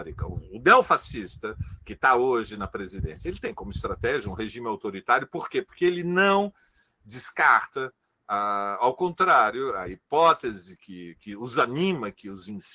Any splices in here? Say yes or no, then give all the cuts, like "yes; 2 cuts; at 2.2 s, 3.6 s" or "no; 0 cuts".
no; 0 cuts